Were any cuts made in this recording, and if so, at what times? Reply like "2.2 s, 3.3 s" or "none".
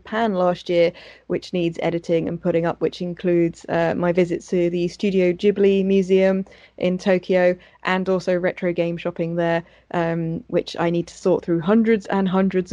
none